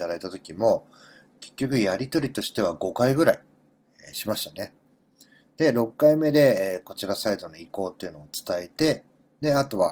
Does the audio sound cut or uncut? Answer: uncut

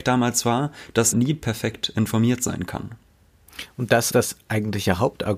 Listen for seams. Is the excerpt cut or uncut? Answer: cut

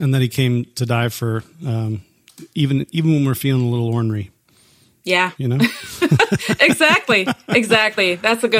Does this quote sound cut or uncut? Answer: uncut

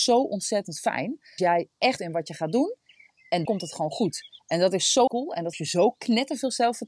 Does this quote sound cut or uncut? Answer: cut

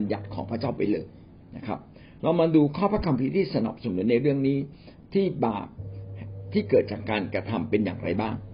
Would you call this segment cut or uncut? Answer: uncut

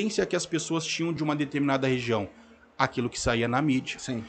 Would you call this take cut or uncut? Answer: uncut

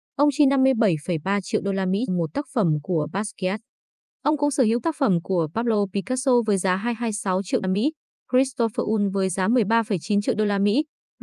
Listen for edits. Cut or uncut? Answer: cut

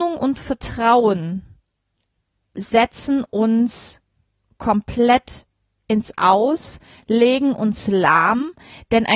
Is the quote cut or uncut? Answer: uncut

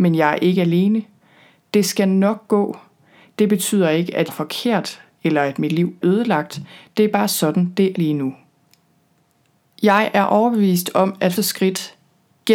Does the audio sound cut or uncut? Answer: cut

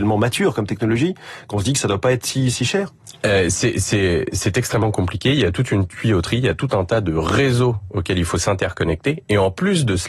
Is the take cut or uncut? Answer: uncut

